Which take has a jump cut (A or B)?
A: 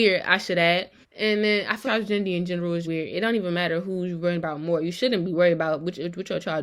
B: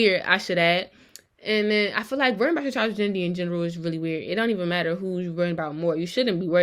A